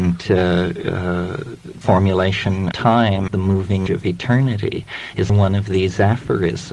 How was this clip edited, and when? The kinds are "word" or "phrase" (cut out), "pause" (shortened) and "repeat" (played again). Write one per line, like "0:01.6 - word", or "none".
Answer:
0:01.8 - word
0:02.7 - word
0:03.3 - word
0:03.9 - word
0:05.3 - word